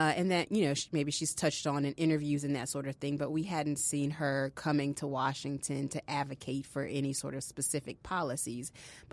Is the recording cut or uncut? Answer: uncut